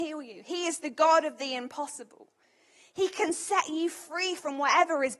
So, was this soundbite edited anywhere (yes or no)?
no